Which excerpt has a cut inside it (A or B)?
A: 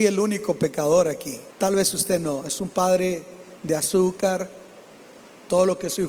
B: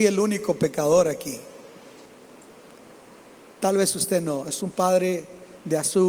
A